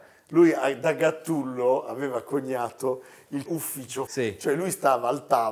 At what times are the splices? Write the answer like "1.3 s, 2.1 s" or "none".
3.5 s, 4.1 s

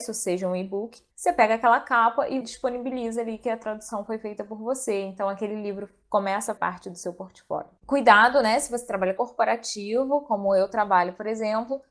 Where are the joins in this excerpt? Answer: 1.1 s, 2.4 s, 6.6 s, 7.8 s, 9.2 s

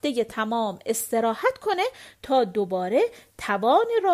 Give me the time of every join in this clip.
none

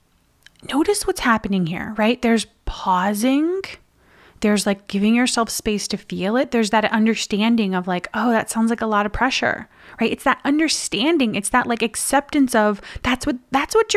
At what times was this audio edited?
none

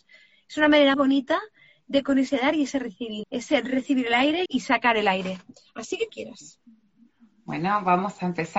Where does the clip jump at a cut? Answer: 0.9 s, 2.0 s, 3.2 s, 4.5 s, 6.1 s

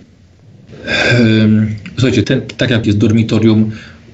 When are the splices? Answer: 2.2 s, 2.8 s

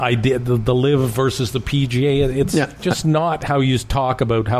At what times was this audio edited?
none

